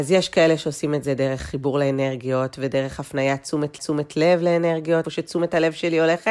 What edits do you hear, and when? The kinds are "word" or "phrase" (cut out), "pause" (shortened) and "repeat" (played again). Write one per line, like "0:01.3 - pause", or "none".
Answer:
0:03.8 - repeat
0:05.0 - word

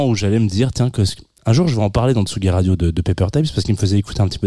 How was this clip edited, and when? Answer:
none

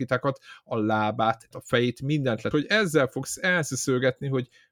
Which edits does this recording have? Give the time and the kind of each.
0:01.5 - word
0:02.5 - phrase

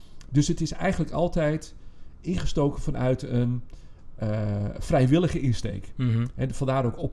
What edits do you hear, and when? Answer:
none

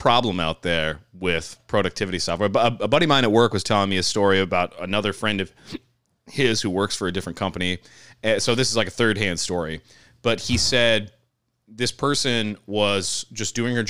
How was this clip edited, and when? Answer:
none

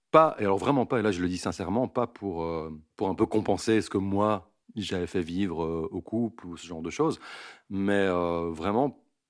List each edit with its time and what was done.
0:04.6 - pause

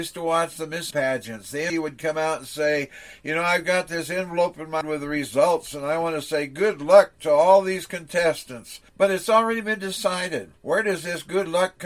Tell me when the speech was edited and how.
0:00.9 - word
0:01.7 - word
0:04.8 - word
0:08.9 - pause
0:10.6 - pause

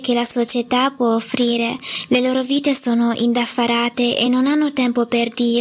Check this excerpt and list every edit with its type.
none

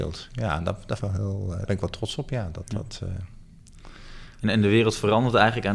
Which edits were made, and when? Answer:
0:01.0 - word
0:01.7 - word

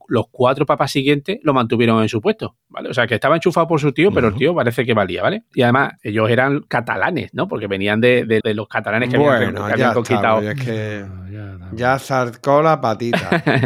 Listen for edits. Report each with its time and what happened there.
0:08.4 - word

